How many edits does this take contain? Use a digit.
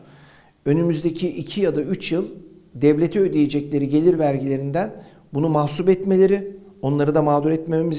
0